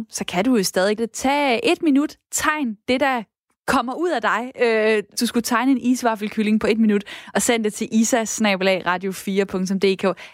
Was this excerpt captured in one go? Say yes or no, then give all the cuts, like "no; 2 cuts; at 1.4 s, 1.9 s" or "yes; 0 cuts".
no; 2 cuts; at 1.0 s, 5.1 s